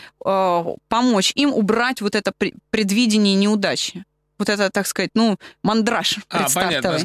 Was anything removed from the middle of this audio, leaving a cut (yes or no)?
no